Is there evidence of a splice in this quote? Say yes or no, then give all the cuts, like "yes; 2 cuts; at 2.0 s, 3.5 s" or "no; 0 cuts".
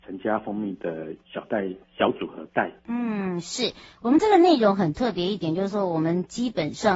yes; 3 cuts; at 1.2 s, 1.8 s, 2.8 s